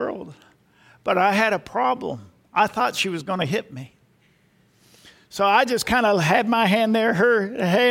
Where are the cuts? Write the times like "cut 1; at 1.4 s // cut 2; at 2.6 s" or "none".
none